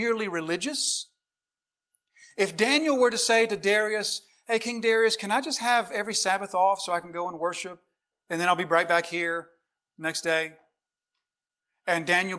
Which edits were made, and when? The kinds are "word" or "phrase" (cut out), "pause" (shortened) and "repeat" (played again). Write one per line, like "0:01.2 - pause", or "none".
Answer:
none